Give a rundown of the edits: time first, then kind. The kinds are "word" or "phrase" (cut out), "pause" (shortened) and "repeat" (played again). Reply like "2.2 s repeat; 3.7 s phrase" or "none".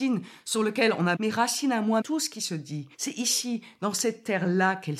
1.2 s phrase; 2.0 s word; 2.9 s pause